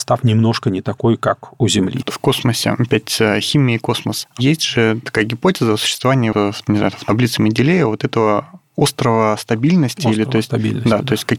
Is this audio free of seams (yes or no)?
no